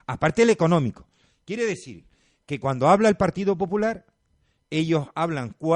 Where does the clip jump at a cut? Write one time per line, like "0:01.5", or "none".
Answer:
none